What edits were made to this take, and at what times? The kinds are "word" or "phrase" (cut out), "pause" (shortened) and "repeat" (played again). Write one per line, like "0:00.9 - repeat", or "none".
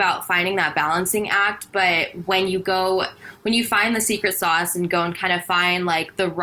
none